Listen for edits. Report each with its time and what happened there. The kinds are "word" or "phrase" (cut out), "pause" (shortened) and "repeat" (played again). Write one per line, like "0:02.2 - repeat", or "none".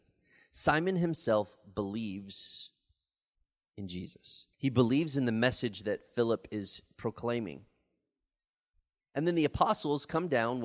0:04.5 - pause